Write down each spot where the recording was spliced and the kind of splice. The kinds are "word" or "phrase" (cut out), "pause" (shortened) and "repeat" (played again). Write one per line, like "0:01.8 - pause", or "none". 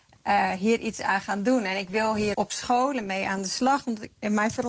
0:02.3 - word